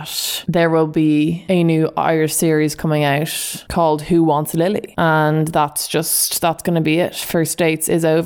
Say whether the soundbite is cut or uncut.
uncut